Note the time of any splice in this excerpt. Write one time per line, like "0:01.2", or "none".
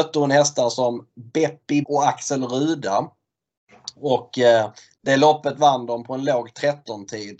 0:01.8

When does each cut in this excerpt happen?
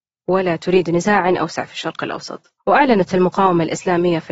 0:02.6

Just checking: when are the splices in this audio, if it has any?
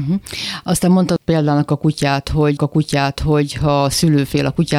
0:02.6

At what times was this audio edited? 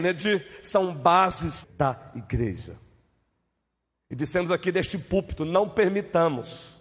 0:01.6

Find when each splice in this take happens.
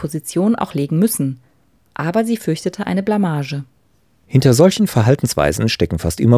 none

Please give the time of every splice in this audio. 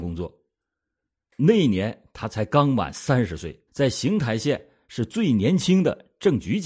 0:03.7

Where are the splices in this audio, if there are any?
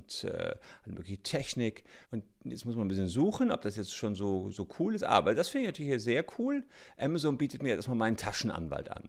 0:02.0

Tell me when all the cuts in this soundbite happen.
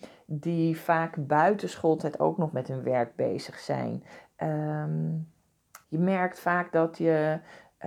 0:05.8

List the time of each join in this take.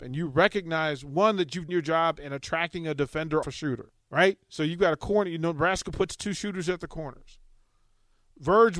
0:01.7
0:03.4
0:04.0

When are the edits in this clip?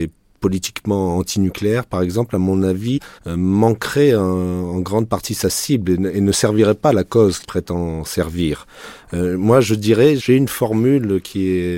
0:03.2
0:07.4

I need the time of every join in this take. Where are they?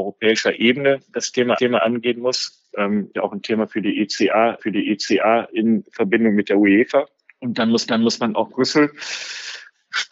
0:01.6
0:03.1
0:04.6
0:07.2
0:07.9
0:08.5

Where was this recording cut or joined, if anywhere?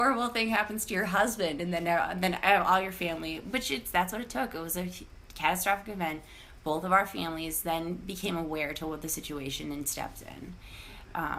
none

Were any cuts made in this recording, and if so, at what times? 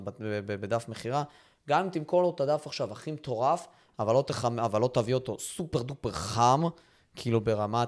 none

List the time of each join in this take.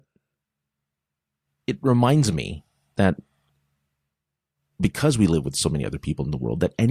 none

